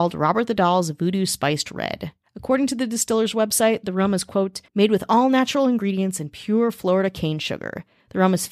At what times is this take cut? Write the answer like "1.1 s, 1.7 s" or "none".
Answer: 4.7 s